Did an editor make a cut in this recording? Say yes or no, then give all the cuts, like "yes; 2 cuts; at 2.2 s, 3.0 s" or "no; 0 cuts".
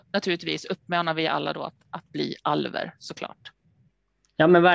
no; 0 cuts